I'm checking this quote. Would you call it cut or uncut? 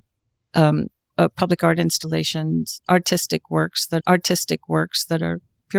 cut